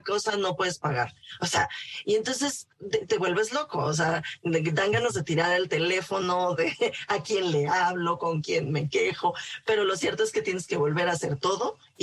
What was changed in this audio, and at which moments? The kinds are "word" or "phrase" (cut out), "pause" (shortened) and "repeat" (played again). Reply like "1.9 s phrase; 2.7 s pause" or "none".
none

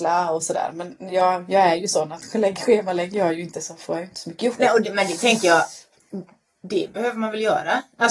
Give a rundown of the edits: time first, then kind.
none

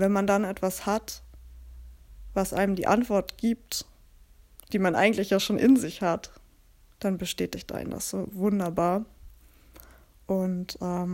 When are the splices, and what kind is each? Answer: none

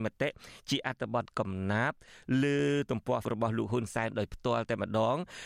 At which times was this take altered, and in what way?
3.2 s word

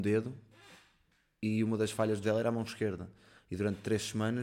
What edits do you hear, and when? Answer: 2.2 s word

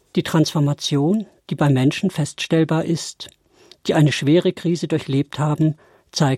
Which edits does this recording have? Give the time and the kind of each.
none

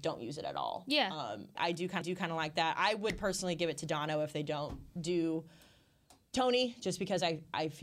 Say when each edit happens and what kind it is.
1.6 s word; 2.0 s repeat

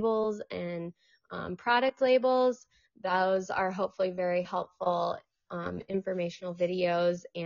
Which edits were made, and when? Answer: none

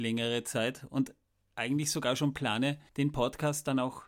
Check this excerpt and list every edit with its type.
1.3 s pause; 2.9 s pause

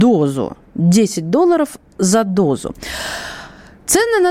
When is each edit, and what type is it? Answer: none

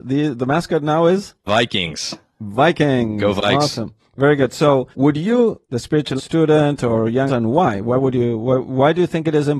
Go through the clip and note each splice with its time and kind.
1.5 s word; 4.0 s pause; 4.9 s pause; 5.6 s word; 6.2 s phrase; 7.3 s word

